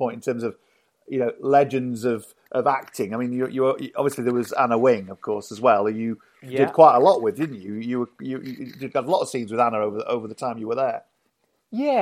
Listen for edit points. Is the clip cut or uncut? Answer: uncut